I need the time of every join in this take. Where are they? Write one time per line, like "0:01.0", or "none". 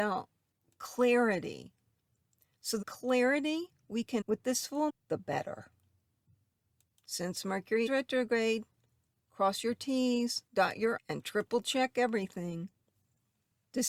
0:02.8
0:04.2
0:04.9
0:07.9
0:10.5
0:11.0